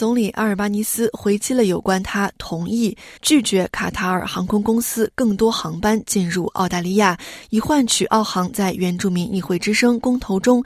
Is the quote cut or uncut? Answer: cut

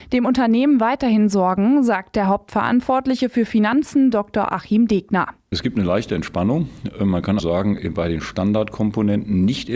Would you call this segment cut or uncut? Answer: cut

